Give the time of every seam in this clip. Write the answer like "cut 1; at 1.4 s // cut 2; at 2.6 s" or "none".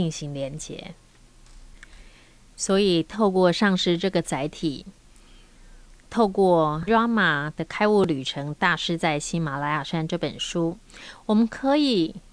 cut 1; at 6.9 s